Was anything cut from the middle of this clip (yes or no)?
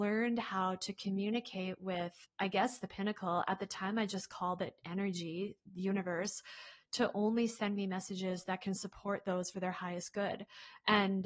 yes